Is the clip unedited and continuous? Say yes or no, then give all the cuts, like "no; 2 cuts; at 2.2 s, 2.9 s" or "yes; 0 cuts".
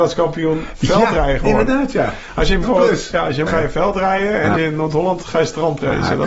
no; 4 cuts; at 2.6 s, 3.5 s, 4.5 s, 5.2 s